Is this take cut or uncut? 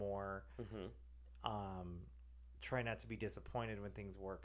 uncut